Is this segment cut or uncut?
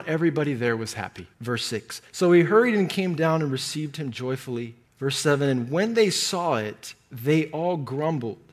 cut